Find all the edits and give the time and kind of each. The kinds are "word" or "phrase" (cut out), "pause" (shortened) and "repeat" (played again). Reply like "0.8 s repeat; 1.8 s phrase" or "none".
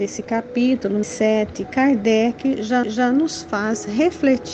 1.0 s word; 2.8 s repeat